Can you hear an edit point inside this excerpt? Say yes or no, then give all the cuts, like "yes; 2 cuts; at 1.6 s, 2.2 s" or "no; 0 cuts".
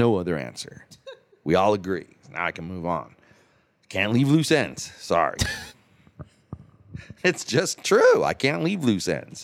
no; 0 cuts